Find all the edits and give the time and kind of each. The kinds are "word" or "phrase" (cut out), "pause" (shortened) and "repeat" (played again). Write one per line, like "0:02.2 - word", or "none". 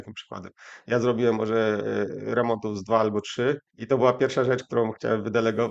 0:03.7 - pause